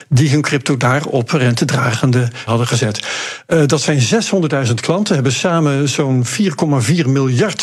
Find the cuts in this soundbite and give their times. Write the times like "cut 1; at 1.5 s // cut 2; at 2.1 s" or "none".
cut 1; at 2.5 s